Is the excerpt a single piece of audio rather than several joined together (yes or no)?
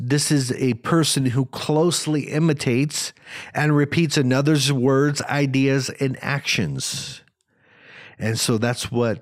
yes